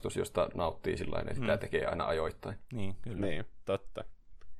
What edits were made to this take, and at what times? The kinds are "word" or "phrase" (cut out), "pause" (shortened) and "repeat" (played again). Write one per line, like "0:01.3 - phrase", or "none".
none